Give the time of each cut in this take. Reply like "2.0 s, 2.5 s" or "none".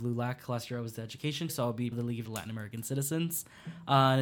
1.5 s, 1.9 s, 2.2 s